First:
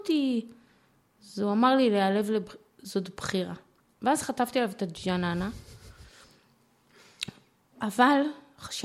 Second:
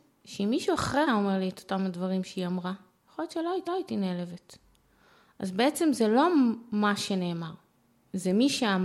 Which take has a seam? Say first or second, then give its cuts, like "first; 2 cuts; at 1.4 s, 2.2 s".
second; 2 cuts; at 1.1 s, 3.7 s